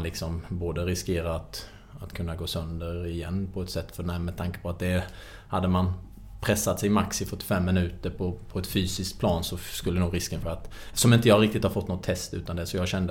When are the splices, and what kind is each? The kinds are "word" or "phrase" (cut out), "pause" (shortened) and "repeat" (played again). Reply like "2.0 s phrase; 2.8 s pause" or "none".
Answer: 10.4 s phrase